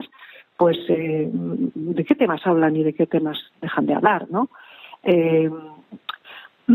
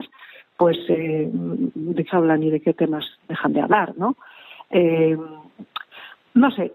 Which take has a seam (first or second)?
second